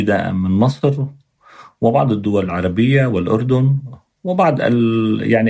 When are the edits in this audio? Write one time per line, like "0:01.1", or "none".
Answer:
none